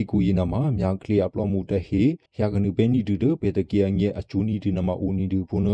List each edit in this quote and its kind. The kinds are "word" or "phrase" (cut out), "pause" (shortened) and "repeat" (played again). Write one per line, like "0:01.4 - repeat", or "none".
0:02.3 - pause